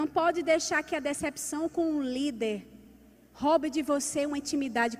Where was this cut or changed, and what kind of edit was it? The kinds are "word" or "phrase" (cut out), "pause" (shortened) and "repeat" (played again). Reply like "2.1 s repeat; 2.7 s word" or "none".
none